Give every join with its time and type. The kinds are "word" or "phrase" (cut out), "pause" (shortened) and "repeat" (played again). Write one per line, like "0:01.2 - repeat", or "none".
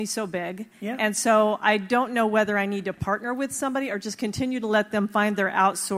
none